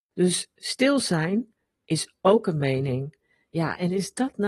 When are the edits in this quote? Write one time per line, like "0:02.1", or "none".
none